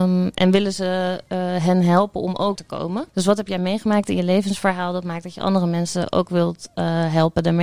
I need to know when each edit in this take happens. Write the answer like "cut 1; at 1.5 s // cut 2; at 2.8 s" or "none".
cut 1; at 2.6 s // cut 2; at 3.1 s